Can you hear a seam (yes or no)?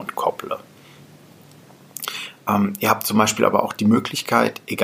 no